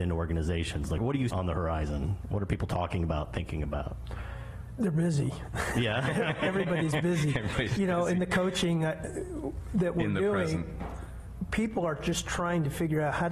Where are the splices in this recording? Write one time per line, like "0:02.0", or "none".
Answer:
0:01.3
0:07.8